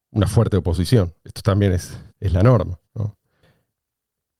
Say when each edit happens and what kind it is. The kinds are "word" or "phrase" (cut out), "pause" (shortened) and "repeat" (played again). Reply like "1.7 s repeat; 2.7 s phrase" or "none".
2.1 s pause; 2.8 s pause